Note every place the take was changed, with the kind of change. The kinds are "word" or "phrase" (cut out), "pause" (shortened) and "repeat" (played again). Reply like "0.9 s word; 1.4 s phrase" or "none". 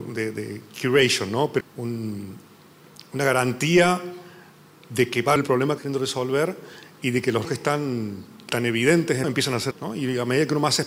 1.6 s word; 5.4 s word; 5.8 s word; 7.4 s word; 8.5 s word; 9.2 s word; 9.7 s word